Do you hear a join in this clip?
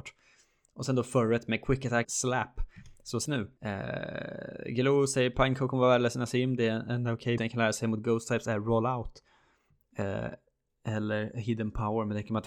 yes; 4 cuts; at 2.0 s, 3.3 s, 3.6 s, 7.4 s

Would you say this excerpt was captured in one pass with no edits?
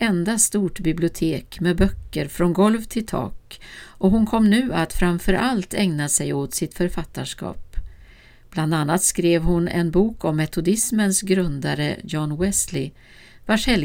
yes; 0 cuts

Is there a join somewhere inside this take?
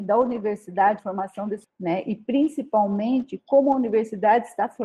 yes; 2 cuts; at 1.0 s, 1.6 s

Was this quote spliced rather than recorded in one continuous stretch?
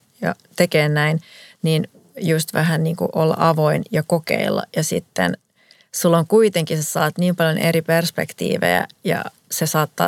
no; 0 cuts

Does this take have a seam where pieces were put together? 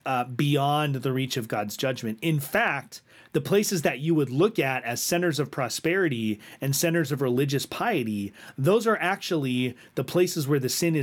no; 0 cuts

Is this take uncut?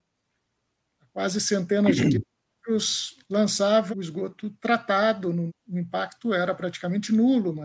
no; 2 cuts; at 3.9 s, 5.5 s

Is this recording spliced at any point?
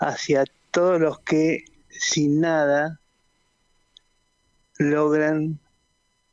no; 0 cuts

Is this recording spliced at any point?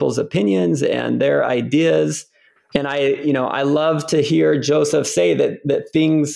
yes; 1 cut; at 2.7 s

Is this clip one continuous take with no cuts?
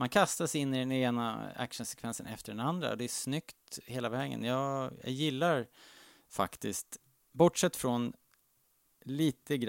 yes; 0 cuts

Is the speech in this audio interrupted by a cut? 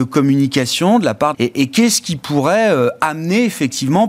yes; 1 cut; at 1.3 s

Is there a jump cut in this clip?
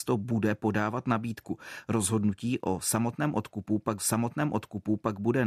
yes; 1 cut; at 4.0 s

